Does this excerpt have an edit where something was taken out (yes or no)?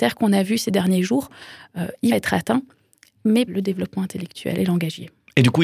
yes